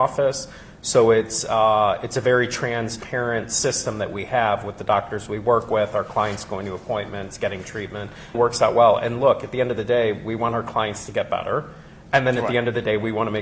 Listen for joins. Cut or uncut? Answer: cut